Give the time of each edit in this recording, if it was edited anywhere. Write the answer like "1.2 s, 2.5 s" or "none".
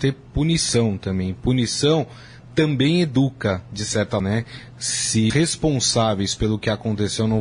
4.2 s, 5.3 s